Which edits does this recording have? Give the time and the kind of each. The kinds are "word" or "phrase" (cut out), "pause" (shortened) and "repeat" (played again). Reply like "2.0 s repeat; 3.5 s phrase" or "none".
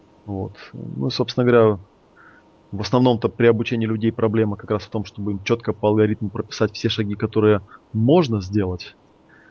none